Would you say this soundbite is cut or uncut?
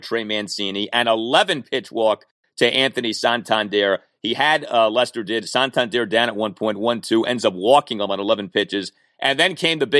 uncut